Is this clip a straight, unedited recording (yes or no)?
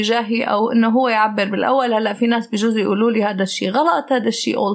yes